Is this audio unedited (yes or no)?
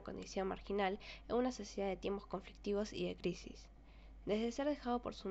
yes